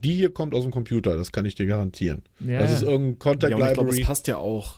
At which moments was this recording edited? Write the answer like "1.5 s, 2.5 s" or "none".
none